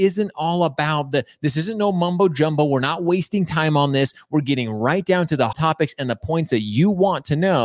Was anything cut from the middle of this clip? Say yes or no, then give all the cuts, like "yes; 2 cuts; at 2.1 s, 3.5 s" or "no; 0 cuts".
yes; 1 cut; at 5.5 s